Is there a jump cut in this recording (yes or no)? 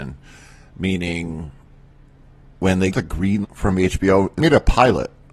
yes